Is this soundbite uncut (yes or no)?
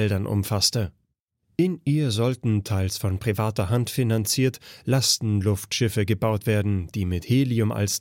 yes